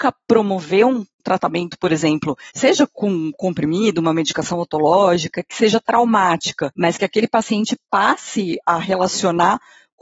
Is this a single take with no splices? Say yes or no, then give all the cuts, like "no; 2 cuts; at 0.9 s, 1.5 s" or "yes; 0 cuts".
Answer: no; 4 cuts; at 1.2 s, 2.5 s, 6.7 s, 8.6 s